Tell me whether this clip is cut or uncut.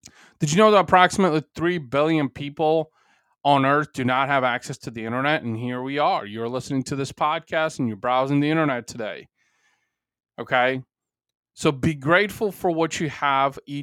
uncut